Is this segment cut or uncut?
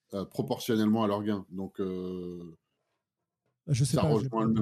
uncut